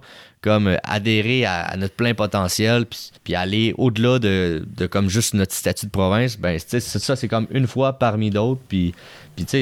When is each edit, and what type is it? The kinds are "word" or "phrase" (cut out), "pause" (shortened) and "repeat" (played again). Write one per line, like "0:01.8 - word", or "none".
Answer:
0:03.2 - pause